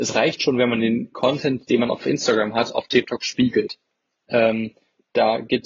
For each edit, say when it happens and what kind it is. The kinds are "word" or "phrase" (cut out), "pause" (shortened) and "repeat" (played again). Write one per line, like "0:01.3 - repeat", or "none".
none